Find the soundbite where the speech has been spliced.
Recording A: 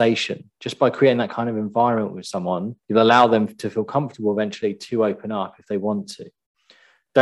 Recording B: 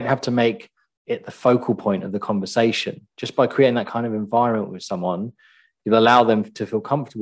A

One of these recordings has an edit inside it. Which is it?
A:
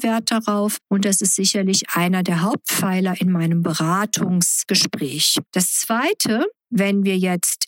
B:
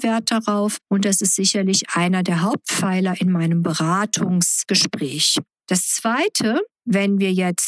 A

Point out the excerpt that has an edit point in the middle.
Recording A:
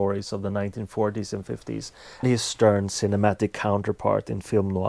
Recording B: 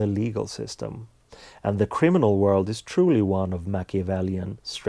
A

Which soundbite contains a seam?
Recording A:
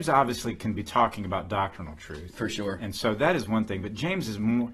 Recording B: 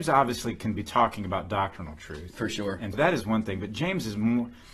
B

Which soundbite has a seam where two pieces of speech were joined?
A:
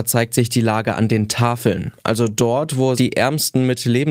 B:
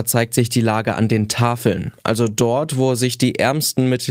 A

